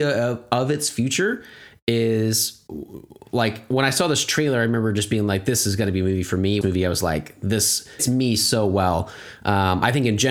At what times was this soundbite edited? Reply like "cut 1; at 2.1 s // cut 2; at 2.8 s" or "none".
cut 1; at 6.6 s // cut 2; at 8.0 s